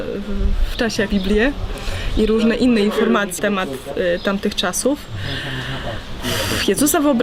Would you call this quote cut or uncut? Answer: cut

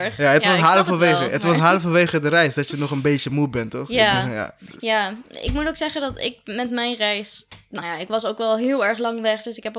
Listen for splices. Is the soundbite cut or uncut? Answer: uncut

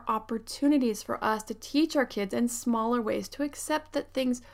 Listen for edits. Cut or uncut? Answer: uncut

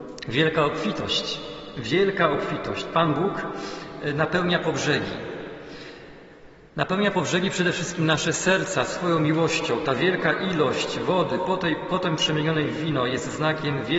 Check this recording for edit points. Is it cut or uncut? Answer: uncut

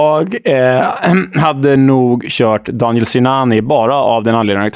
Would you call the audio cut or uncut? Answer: uncut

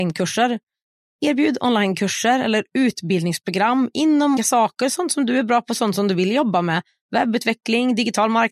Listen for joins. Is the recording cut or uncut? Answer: cut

